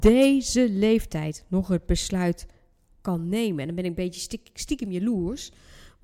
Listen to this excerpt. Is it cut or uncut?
uncut